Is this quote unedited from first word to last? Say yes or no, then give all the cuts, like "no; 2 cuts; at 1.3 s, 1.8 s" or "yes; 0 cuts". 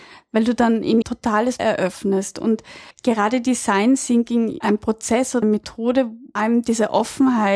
no; 6 cuts; at 1.0 s, 1.6 s, 2.9 s, 4.6 s, 5.4 s, 6.4 s